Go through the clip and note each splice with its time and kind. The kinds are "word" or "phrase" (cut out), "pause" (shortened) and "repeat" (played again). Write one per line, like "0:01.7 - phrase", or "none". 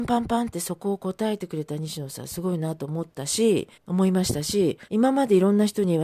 0:03.8 - pause
0:04.9 - pause